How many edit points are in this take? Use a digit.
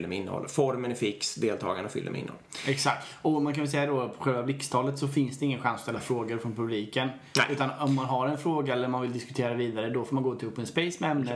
0